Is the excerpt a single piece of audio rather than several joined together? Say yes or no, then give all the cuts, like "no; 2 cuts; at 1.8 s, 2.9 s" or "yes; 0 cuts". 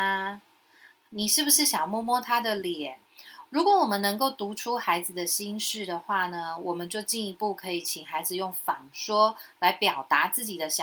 no; 1 cut; at 3.1 s